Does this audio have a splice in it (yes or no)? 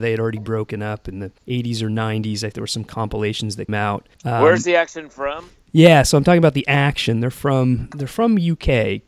yes